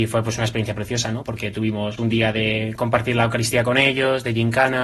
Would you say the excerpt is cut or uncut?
cut